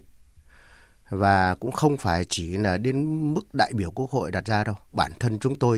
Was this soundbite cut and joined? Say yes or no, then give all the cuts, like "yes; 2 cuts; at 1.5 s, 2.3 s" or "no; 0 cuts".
no; 0 cuts